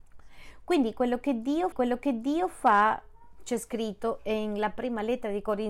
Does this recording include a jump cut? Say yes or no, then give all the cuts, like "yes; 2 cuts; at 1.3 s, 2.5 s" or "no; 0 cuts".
yes; 1 cut; at 1.7 s